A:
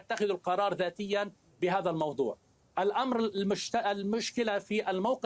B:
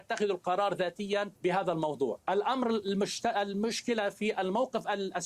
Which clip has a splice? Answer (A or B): B